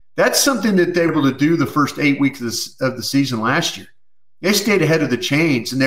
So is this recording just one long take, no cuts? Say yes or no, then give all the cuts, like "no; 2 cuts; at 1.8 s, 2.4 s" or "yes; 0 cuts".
no; 1 cut; at 1.1 s